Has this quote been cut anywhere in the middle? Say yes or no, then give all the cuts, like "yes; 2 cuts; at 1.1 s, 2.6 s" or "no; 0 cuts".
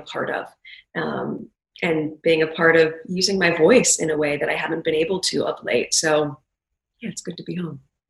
no; 0 cuts